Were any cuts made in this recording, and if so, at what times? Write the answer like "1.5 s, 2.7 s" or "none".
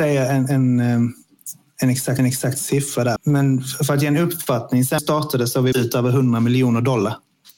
2.2 s, 3.2 s, 5.0 s, 5.7 s